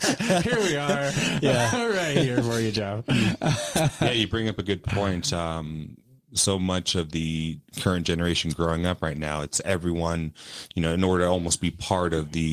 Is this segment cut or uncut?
uncut